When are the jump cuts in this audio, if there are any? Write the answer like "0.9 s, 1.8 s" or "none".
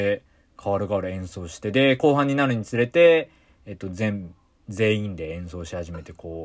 none

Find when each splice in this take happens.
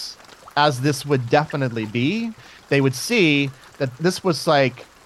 none

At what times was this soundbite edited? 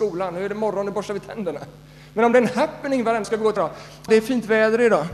3.2 s, 3.6 s, 4.1 s

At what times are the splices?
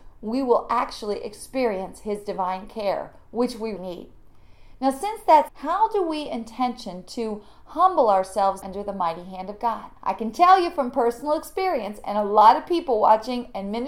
3.8 s, 5.5 s, 8.6 s, 10.0 s

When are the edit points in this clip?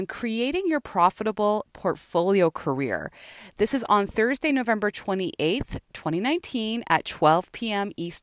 none

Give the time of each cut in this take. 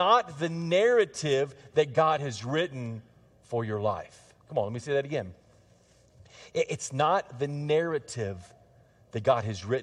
4.4 s

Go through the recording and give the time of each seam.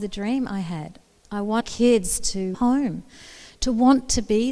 1.6 s, 2.5 s

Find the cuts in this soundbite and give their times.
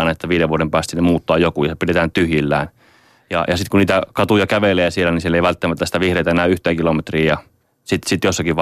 none

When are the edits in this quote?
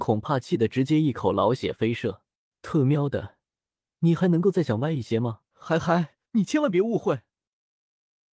2.5 s, 5.5 s, 6.3 s

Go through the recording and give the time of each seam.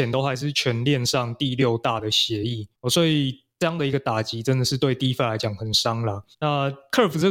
2.7 s, 6.3 s

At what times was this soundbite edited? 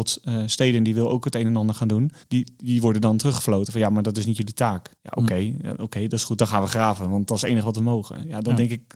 2.2 s, 4.9 s

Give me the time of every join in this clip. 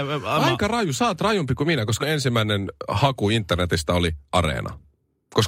2.0 s, 4.3 s

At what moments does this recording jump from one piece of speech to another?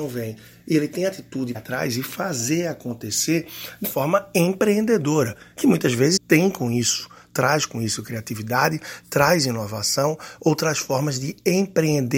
1.5 s, 3.8 s, 6.2 s

